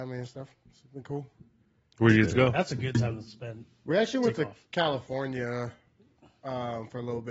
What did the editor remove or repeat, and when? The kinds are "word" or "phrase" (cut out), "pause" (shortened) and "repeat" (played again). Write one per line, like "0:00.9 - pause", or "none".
none